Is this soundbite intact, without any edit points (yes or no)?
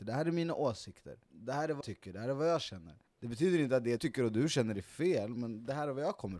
no